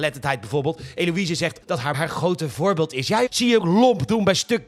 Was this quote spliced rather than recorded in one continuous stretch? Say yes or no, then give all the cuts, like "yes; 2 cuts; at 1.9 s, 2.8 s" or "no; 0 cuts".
yes; 4 cuts; at 1.6 s, 1.9 s, 3.3 s, 3.6 s